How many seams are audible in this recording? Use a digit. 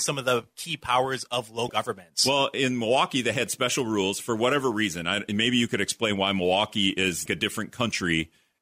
2